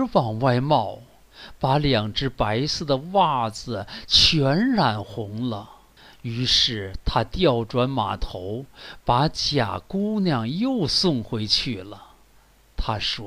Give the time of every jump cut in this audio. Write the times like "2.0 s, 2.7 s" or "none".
6.0 s